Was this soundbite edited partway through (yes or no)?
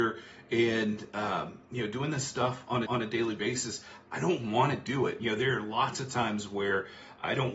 yes